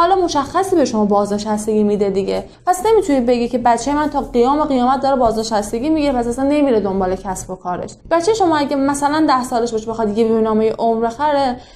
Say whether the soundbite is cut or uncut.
cut